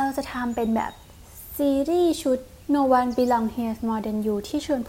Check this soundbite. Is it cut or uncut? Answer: uncut